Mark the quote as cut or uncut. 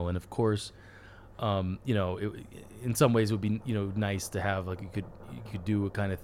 uncut